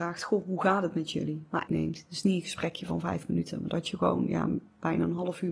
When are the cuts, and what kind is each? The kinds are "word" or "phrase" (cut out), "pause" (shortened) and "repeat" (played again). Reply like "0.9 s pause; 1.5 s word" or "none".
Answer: 1.7 s phrase